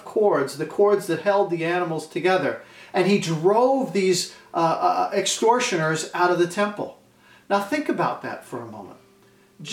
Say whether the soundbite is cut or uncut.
uncut